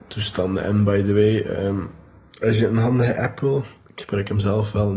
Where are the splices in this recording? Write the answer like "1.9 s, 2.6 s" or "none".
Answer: none

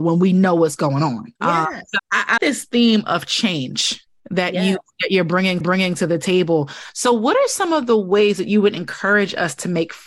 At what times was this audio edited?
1.4 s, 2.0 s, 2.4 s, 5.6 s

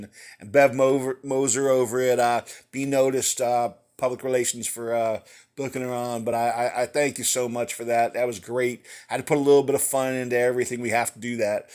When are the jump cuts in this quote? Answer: none

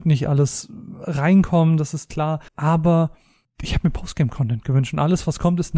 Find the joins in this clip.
2.5 s

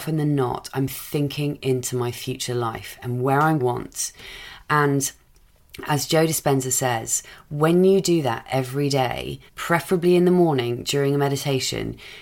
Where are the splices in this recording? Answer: 3.6 s, 9.5 s

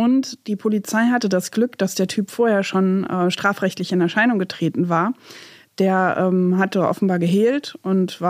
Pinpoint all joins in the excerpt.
none

